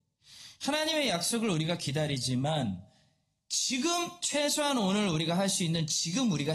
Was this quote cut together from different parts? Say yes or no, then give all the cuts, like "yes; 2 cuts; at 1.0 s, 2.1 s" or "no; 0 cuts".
no; 0 cuts